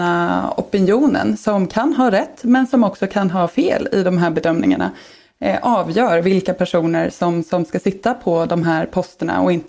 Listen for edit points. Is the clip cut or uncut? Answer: uncut